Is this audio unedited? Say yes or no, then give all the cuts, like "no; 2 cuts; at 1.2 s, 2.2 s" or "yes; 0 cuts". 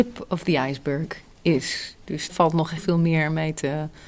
no; 2 cuts; at 2.3 s, 2.8 s